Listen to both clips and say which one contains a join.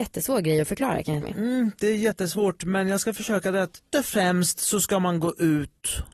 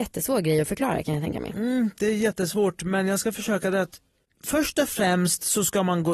first; 2 cuts; at 1.2 s, 3.9 s

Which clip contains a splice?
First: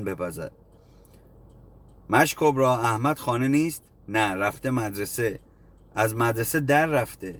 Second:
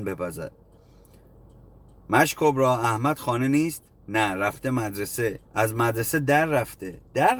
second; 1 cut; at 5.4 s

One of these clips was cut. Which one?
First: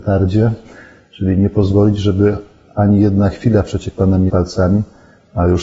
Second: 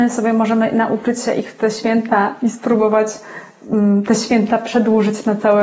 first; 1 cut; at 4.3 s

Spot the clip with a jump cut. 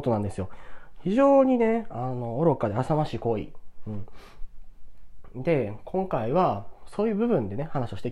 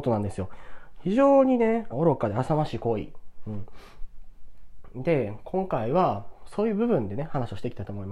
second; 1 cut; at 1.9 s

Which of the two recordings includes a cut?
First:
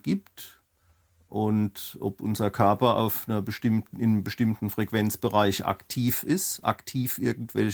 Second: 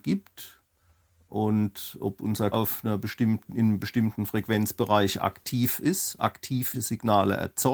second; 2 cuts; at 2.5 s, 6.7 s

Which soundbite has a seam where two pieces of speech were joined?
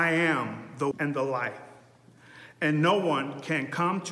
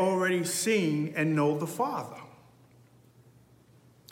first; 1 cut; at 0.9 s

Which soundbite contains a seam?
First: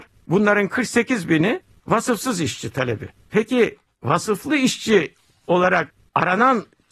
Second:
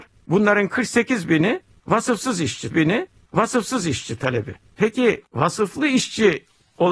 second; 2 cuts; at 2.7 s, 5.3 s

